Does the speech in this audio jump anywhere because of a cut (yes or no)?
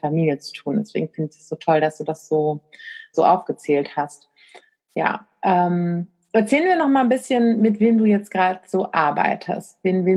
yes